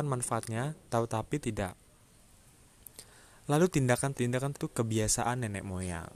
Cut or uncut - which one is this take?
cut